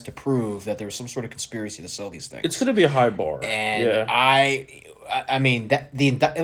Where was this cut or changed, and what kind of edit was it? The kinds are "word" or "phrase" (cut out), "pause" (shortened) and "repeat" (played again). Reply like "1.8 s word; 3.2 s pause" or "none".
none